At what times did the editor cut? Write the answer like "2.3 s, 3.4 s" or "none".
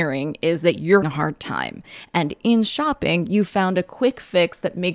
1.0 s